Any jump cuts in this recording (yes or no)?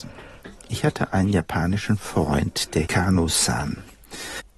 yes